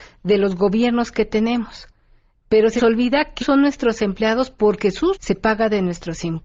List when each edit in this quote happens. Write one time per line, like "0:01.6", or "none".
0:02.8
0:03.4
0:05.1